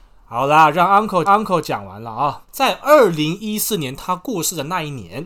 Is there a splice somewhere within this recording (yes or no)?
yes